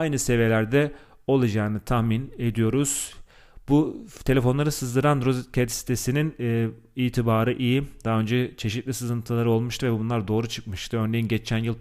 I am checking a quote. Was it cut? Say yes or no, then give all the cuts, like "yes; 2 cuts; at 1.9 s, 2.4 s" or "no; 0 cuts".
no; 0 cuts